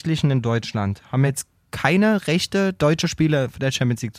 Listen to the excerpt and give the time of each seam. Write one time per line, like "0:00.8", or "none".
none

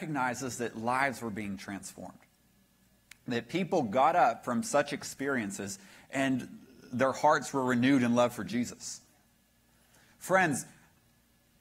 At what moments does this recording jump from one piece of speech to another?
none

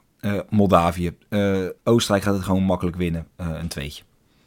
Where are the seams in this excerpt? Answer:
0:01.8

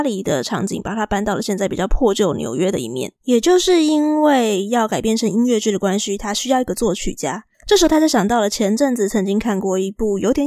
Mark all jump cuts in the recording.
0:03.2
0:07.5

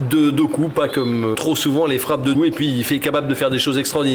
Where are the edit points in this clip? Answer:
0:00.9
0:01.3
0:02.3

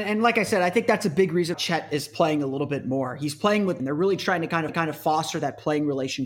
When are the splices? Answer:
0:01.5
0:03.8
0:04.7

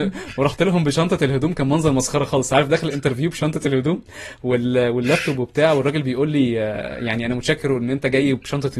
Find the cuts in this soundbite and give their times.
none

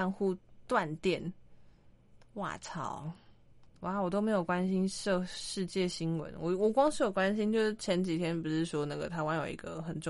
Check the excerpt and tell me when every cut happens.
0:03.7

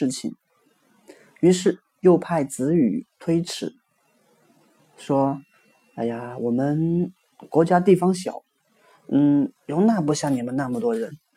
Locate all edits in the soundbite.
0:09.6

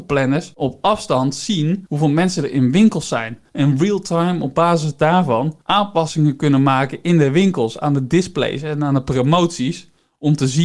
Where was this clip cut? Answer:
0:05.6

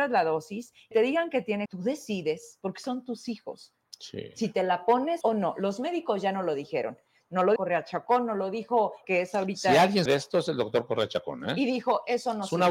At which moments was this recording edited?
0:00.9
0:01.7
0:05.2
0:07.6
0:09.0
0:10.1

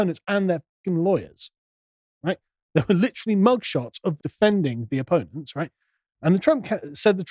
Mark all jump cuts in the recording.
0:04.2

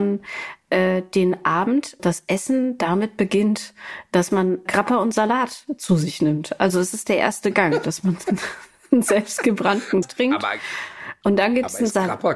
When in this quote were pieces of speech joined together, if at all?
0:02.0
0:04.7
0:10.0

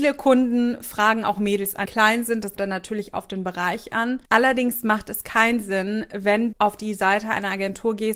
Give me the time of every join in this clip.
0:01.9
0:02.6
0:04.3
0:06.5

